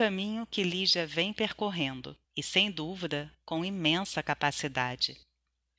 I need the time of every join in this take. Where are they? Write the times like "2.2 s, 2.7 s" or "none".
2.2 s